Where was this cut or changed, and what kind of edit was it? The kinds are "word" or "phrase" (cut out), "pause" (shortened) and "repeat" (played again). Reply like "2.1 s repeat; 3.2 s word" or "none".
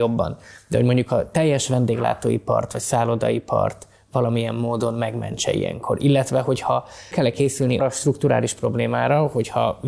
7.1 s word; 7.8 s word

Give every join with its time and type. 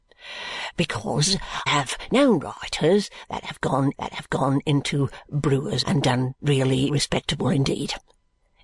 1.7 s word; 3.9 s repeat; 5.8 s word; 6.9 s word

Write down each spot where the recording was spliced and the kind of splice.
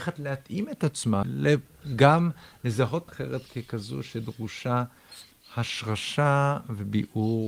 1.2 s word; 3.1 s word; 5.3 s pause

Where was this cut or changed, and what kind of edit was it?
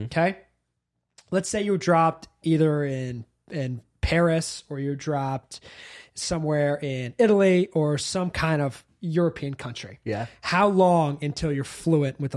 none

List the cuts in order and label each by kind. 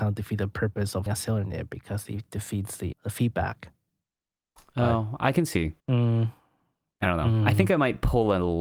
1.1 s word; 2.9 s word; 5.8 s pause

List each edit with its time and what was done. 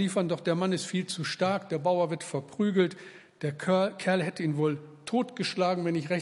none

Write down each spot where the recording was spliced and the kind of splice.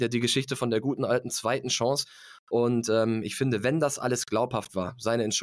none

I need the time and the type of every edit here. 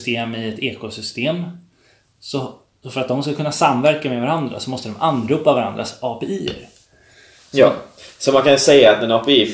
none

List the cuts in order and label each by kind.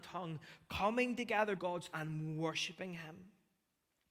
1.6 s word; 1.9 s word

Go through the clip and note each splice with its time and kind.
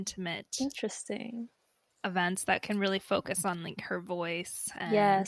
none

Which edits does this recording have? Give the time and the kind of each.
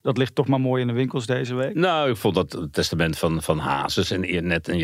none

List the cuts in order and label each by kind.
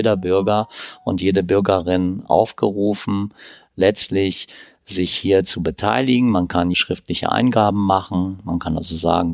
6.7 s word

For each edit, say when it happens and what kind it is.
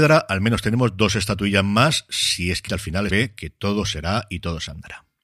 2.7 s word; 3.1 s phrase

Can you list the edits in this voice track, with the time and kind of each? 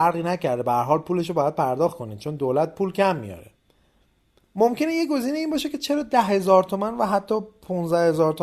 none

